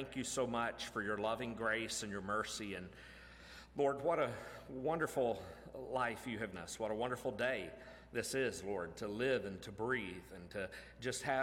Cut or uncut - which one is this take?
cut